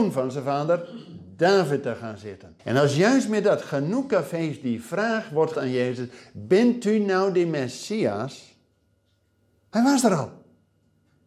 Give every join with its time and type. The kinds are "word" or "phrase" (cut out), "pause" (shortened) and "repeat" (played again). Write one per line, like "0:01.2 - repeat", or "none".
0:02.6 - pause
0:05.5 - word